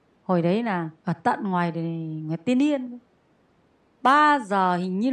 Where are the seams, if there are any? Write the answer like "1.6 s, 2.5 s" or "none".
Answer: 1.0 s